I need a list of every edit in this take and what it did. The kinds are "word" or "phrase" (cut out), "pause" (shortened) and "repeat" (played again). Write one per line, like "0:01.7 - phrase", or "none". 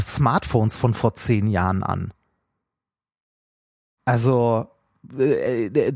none